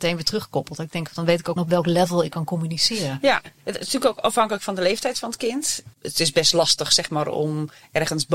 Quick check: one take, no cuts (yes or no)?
no